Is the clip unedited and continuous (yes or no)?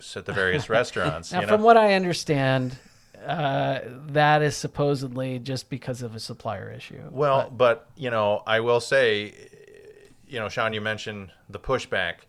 yes